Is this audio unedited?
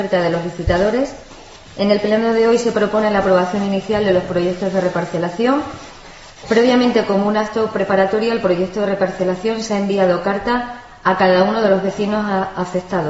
yes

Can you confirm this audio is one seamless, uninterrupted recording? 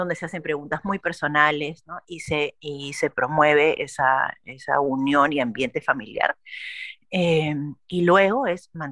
yes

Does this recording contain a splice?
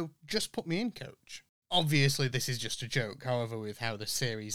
no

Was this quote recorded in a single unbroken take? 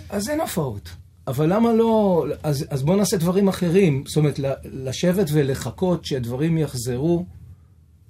yes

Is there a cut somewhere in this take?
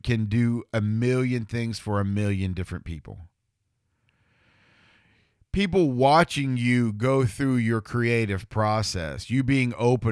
no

